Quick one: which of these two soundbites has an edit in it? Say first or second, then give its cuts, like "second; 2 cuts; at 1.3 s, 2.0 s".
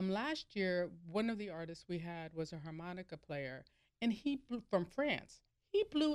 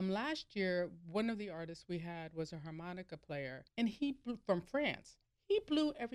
second; 1 cut; at 3.7 s